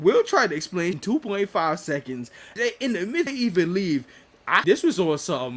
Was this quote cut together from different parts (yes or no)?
yes